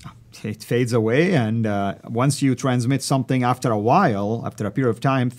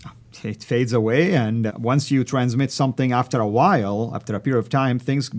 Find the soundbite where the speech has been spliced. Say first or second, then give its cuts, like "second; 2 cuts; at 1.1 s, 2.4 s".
second; 1 cut; at 1.7 s